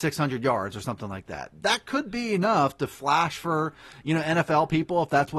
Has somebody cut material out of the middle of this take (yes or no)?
no